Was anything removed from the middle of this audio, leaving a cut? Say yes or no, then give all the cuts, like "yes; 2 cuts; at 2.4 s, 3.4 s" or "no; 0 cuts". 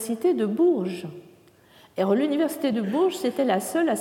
no; 0 cuts